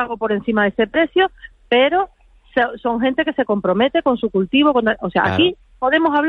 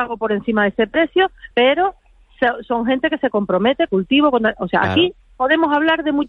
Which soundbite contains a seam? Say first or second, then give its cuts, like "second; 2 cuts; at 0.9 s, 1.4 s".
second; 2 cuts; at 1.5 s, 3.9 s